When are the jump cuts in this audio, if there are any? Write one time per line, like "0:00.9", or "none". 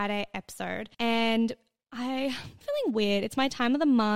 0:00.9
0:02.6